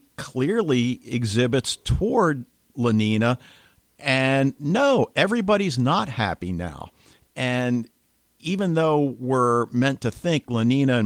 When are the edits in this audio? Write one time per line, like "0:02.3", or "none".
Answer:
none